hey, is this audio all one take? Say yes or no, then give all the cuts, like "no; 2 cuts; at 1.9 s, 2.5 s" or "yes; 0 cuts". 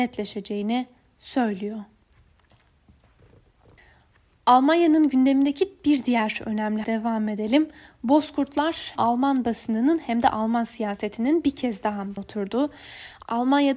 no; 3 cuts; at 6.8 s, 9.0 s, 12.2 s